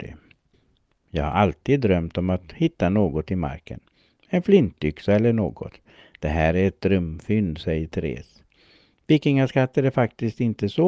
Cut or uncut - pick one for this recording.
uncut